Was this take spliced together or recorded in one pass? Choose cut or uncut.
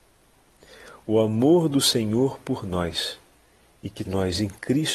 cut